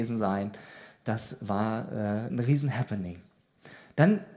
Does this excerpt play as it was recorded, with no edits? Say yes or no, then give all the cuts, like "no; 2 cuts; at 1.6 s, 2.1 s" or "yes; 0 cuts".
no; 1 cut; at 2.3 s